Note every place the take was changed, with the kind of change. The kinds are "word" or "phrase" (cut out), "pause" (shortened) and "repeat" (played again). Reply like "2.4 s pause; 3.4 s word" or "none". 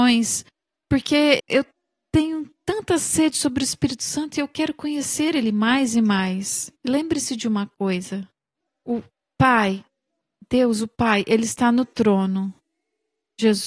1.4 s word; 6.8 s pause